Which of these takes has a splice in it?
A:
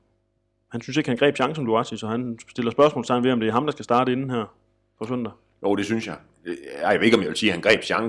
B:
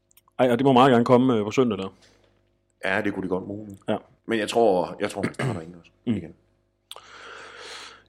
B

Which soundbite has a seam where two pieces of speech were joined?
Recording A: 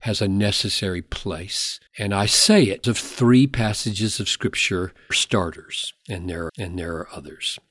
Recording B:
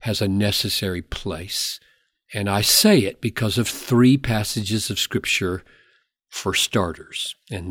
A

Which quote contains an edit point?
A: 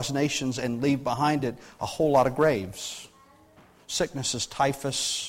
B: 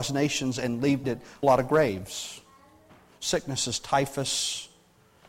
B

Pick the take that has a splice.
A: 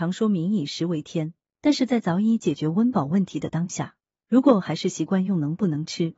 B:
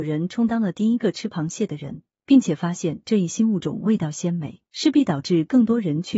B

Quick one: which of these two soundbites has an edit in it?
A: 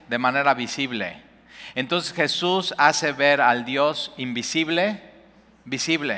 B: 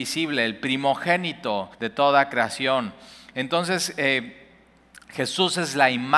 B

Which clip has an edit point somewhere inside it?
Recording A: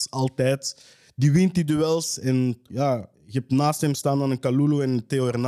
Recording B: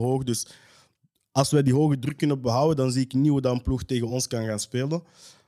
A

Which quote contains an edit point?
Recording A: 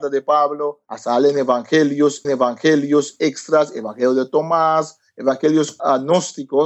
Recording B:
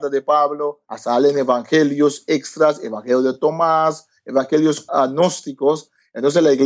A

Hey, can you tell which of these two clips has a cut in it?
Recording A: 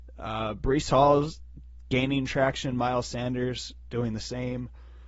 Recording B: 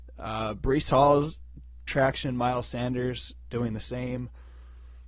B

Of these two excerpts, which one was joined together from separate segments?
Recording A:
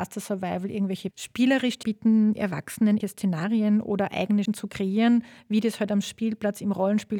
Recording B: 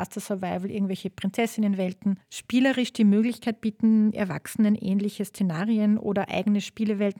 A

